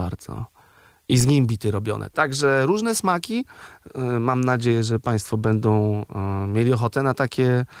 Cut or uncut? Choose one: uncut